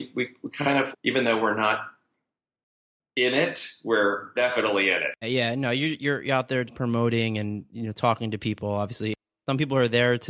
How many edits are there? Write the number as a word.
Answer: four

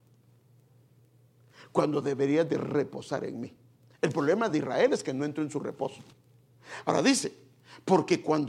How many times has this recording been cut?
zero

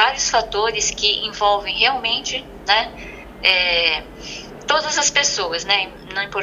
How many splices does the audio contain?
zero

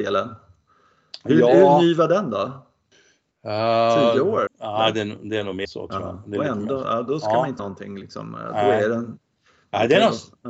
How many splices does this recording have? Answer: three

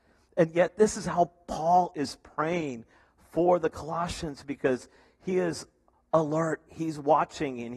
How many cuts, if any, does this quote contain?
zero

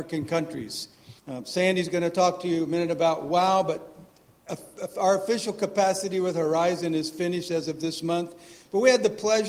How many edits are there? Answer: one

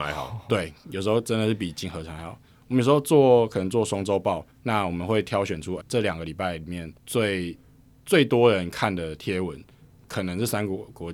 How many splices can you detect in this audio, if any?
three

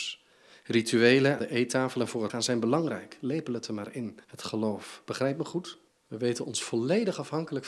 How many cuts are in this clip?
four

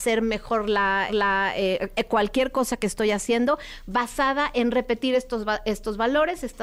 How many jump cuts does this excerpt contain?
one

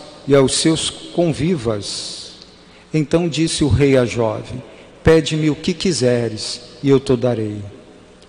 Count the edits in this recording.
zero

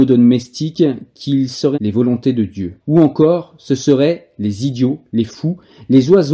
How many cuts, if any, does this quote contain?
two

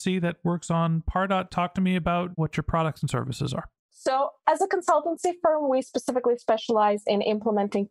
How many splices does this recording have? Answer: one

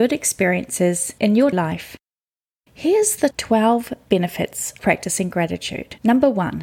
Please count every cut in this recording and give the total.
three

